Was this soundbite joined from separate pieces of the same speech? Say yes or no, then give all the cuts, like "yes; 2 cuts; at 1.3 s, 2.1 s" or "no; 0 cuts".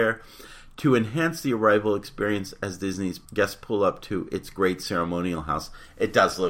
yes; 1 cut; at 3.2 s